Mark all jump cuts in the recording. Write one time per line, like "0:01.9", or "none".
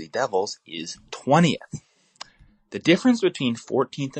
none